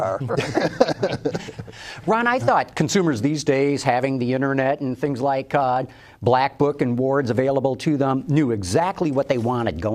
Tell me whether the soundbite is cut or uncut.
uncut